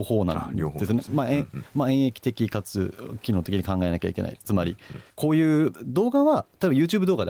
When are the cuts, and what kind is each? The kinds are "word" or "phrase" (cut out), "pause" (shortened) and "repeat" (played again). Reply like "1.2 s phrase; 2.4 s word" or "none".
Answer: 5.1 s pause